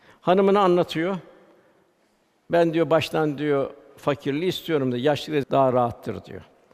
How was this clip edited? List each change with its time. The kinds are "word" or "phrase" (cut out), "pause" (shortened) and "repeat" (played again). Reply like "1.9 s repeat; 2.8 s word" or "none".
5.4 s word